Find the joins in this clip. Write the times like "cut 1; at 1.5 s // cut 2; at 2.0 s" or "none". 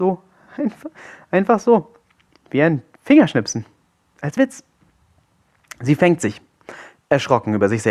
cut 1; at 4.4 s